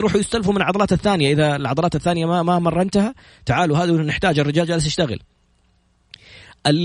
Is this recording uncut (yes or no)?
yes